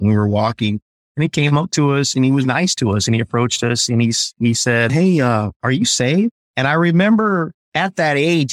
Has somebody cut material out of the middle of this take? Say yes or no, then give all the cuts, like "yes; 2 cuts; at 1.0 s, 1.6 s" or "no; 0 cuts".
yes; 1 cut; at 2.4 s